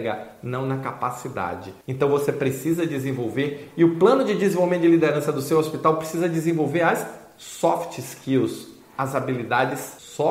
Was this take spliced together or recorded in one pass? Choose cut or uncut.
uncut